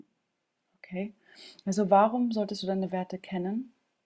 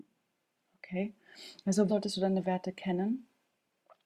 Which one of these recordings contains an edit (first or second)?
second